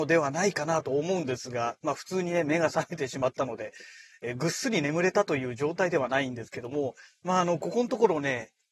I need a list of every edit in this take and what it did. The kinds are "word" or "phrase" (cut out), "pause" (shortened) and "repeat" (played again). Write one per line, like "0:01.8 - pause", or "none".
0:07.1 - pause